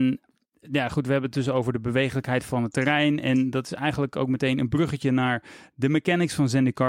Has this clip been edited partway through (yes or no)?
no